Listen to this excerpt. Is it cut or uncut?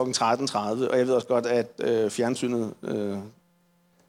uncut